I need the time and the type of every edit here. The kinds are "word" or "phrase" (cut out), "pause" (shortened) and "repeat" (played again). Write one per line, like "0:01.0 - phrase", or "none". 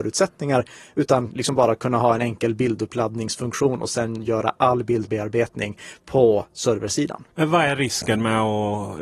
0:07.3 - pause